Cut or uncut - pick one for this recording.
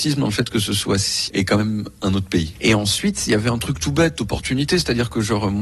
cut